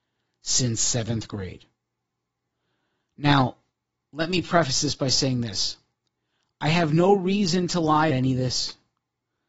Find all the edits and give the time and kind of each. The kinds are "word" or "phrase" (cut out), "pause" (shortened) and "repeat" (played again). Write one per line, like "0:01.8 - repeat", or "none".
0:08.1 - word